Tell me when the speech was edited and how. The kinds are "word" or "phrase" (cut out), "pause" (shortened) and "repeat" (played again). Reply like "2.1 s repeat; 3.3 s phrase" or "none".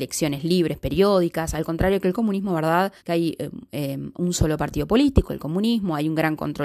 3.0 s pause